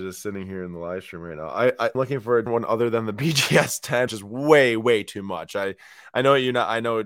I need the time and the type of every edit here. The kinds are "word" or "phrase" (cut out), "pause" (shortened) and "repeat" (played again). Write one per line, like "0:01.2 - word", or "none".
0:01.9 - phrase
0:02.5 - word
0:04.1 - word